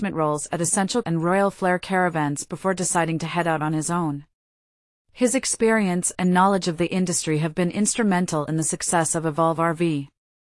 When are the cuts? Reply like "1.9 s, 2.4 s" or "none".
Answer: 1.0 s